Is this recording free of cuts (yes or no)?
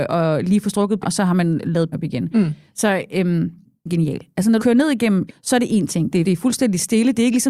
no